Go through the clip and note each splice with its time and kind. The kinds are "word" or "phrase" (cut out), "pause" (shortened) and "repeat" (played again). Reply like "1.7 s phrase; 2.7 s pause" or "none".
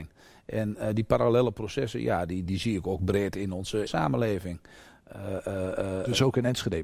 2.5 s word; 3.9 s phrase

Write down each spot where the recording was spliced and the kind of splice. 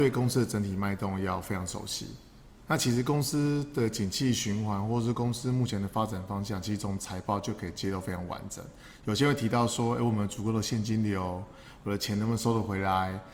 none

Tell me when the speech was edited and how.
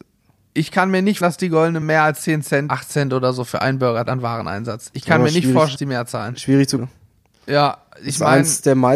1.2 s word; 1.8 s word; 2.7 s word; 4.1 s word; 5.8 s word; 6.8 s word

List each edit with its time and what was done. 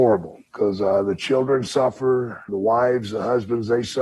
2.5 s word

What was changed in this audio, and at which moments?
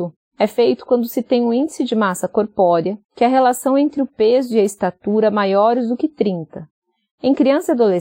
3.0 s pause

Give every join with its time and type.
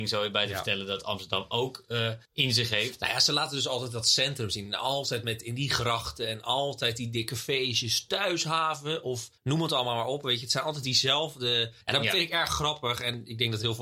2.2 s pause; 9.4 s pause; 11.8 s pause

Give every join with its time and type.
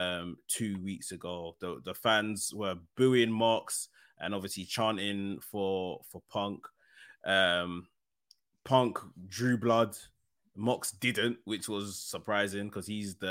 none

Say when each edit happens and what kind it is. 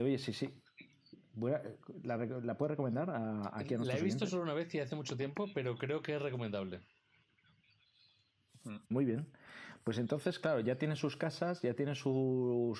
8.8 s pause

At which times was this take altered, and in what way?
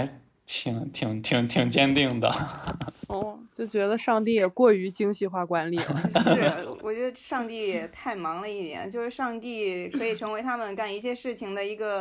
none

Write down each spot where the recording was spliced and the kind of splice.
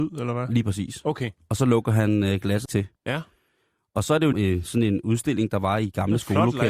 2.7 s word; 3.0 s pause; 4.3 s word

